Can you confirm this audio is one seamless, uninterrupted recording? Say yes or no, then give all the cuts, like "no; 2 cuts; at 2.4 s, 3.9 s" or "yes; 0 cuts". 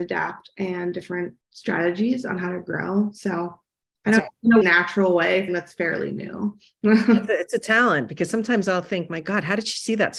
no; 4 cuts; at 1.4 s, 4.2 s, 4.6 s, 5.5 s